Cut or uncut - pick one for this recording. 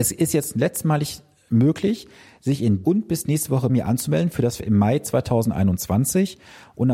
cut